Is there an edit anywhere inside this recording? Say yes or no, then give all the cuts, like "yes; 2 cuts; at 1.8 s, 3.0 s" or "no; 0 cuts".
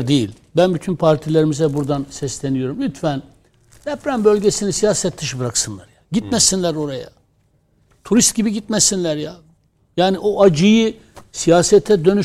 no; 0 cuts